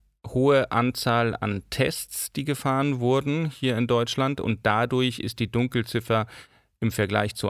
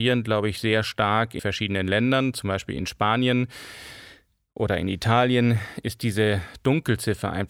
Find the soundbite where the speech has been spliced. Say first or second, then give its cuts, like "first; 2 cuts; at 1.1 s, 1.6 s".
second; 1 cut; at 1.4 s